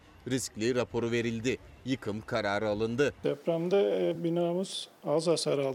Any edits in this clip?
no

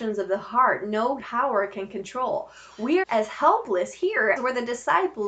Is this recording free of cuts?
no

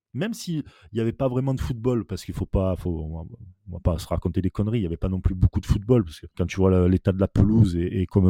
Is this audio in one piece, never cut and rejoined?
no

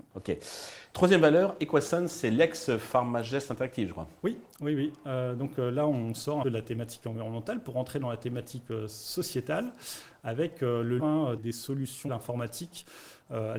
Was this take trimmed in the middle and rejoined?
yes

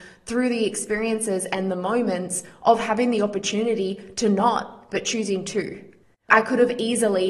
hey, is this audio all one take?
yes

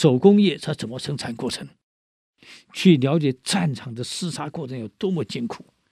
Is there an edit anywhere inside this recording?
no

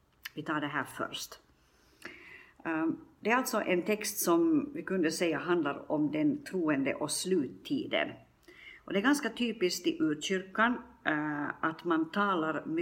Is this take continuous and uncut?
yes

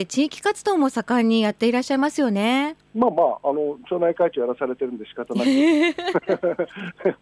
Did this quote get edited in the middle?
yes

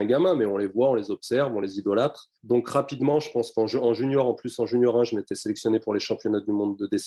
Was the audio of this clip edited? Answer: yes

